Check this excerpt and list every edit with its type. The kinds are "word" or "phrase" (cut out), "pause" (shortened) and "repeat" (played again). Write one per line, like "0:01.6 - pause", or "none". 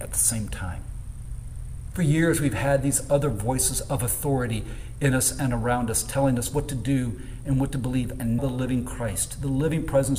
0:08.4 - word